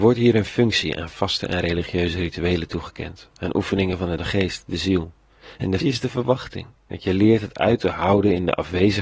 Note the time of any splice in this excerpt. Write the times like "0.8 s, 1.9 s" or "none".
4.2 s, 5.8 s, 6.8 s